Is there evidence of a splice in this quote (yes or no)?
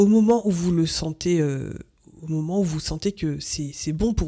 no